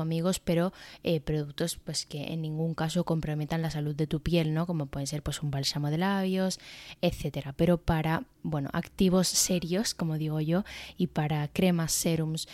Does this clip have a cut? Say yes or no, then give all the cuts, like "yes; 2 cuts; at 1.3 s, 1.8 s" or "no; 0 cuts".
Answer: no; 0 cuts